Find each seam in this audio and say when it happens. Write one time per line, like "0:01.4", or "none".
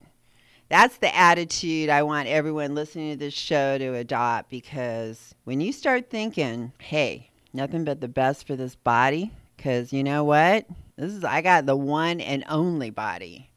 0:05.4
0:06.8
0:09.5
0:10.9